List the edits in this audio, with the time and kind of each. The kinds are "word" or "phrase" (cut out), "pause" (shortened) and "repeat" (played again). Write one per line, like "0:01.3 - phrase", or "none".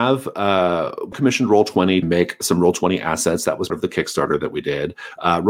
0:01.1 - word
0:02.0 - word
0:03.7 - word